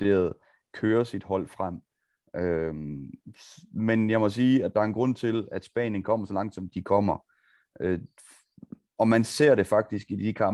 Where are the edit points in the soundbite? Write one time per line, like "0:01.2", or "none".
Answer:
0:06.7

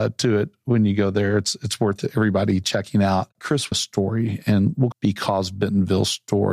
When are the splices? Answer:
0:03.3
0:03.7
0:04.9

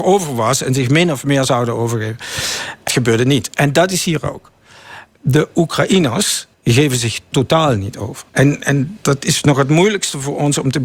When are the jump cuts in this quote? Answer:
0:02.9
0:06.5
0:08.3
0:09.0

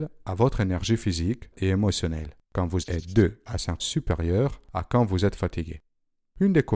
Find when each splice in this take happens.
0:01.5
0:02.4
0:02.8
0:03.8

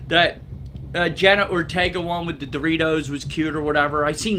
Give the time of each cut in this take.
none

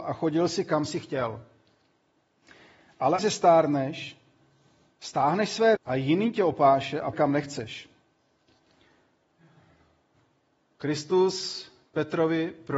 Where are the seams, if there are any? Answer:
0:03.2
0:05.8
0:07.1

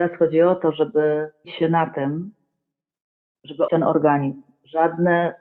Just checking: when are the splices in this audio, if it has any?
0:01.4
0:03.7

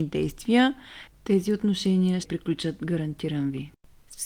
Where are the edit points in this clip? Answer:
0:02.2

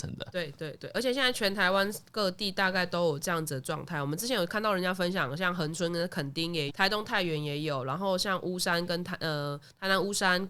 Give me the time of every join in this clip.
0:06.7

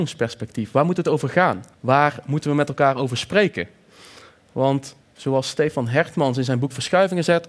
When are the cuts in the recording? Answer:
0:01.7
0:05.0

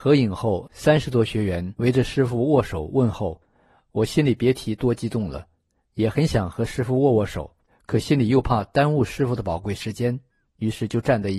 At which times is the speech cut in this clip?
0:07.7

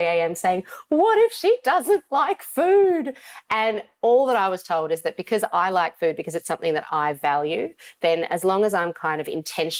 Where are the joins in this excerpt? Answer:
none

